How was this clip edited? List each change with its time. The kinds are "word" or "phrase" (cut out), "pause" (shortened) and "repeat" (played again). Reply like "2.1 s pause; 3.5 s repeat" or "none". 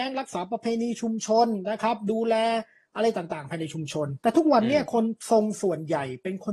4.2 s pause